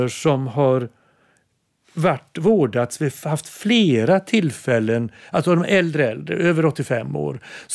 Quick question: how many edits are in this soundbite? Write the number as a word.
zero